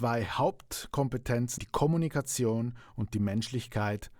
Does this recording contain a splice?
yes; 1 cut; at 1.6 s

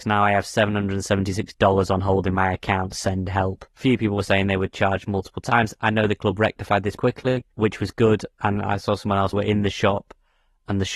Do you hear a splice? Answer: yes; 4 cuts; at 3.7 s, 7.0 s, 7.5 s, 9.3 s

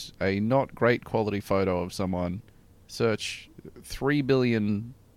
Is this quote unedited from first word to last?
no; 1 cut; at 2.6 s

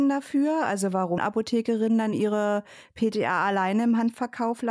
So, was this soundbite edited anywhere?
yes; 2 cuts; at 1.2 s, 2.1 s

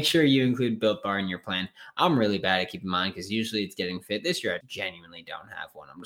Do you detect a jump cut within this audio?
yes; 1 cut; at 4.6 s

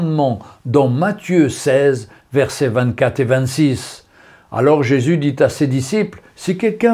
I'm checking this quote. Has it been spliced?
no; 0 cuts

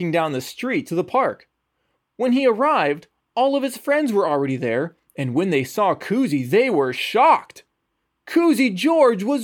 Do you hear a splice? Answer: no; 0 cuts

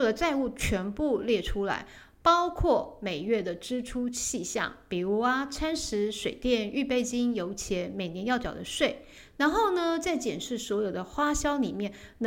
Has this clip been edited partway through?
no; 0 cuts

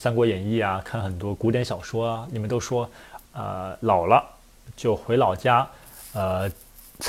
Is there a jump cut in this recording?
yes; 1 cut; at 3.2 s

